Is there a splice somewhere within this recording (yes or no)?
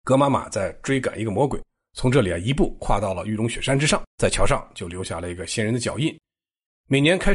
yes